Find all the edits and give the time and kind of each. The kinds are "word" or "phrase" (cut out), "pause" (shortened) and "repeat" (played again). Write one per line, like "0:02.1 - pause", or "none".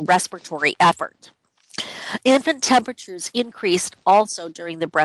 none